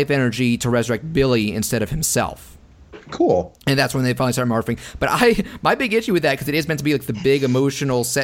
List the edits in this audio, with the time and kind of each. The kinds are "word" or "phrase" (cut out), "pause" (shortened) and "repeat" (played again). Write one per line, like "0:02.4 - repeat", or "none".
0:03.6 - pause